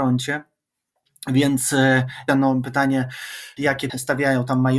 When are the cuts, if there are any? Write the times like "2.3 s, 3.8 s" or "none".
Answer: 2.3 s, 3.6 s, 3.9 s